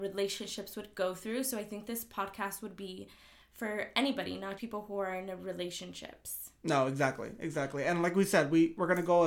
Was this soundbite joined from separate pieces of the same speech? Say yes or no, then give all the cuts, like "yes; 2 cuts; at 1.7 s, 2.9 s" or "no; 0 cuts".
yes; 1 cut; at 4.6 s